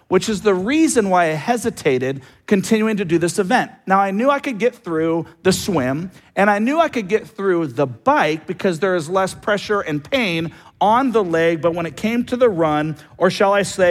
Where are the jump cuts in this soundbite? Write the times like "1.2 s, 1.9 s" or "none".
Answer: none